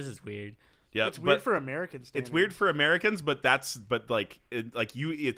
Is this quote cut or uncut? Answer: uncut